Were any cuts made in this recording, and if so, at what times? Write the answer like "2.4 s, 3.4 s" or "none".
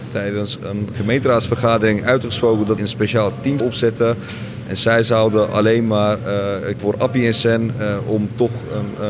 0.9 s, 2.8 s, 3.6 s, 6.8 s